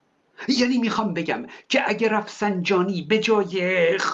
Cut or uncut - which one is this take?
uncut